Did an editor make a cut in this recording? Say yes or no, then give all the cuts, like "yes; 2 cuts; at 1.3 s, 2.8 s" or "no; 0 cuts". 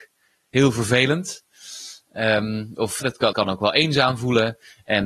yes; 2 cuts; at 3.0 s, 3.3 s